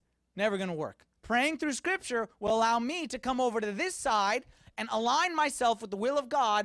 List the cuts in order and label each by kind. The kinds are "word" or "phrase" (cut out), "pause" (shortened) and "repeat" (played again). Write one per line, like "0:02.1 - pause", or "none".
0:01.2 - pause